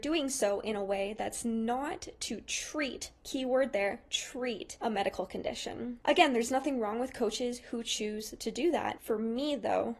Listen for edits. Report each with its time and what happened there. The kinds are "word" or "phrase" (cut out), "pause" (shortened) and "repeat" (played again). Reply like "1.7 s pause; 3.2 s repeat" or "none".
none